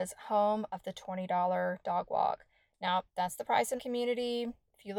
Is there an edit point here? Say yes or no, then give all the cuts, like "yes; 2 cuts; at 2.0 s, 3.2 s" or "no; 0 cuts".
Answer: yes; 2 cuts; at 3.1 s, 3.8 s